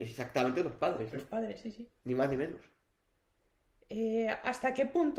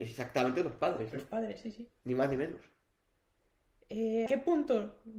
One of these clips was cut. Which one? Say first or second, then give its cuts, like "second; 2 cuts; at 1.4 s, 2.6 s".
second; 1 cut; at 4.3 s